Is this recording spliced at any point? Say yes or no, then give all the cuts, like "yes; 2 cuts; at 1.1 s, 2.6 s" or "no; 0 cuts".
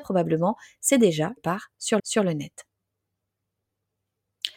yes; 2 cuts; at 1.4 s, 2.0 s